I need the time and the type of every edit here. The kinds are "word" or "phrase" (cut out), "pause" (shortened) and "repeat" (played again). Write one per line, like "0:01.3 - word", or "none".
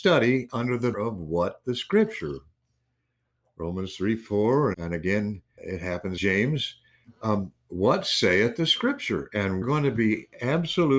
0:00.9 - word
0:01.6 - word
0:04.7 - word
0:05.6 - word
0:06.2 - word
0:09.6 - word